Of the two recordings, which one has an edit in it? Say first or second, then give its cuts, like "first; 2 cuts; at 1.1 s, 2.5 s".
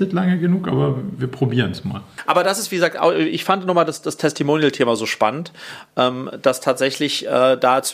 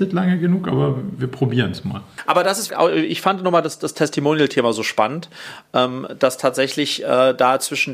second; 1 cut; at 2.7 s